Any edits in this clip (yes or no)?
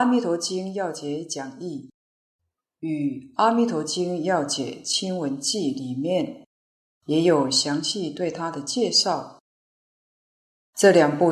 no